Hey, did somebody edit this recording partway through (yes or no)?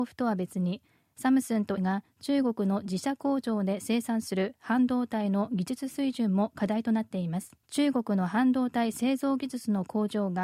yes